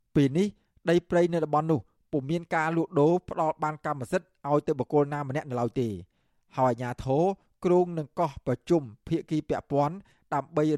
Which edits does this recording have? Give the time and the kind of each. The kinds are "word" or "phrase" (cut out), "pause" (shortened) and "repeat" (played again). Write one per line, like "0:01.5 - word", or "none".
none